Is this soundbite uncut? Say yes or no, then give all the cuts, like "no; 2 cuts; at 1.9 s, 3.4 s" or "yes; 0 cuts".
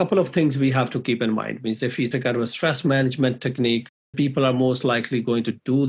no; 2 cuts; at 2.1 s, 4.1 s